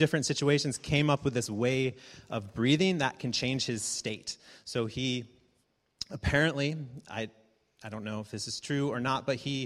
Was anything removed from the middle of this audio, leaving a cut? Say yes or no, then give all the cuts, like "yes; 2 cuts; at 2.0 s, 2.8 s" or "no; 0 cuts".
no; 0 cuts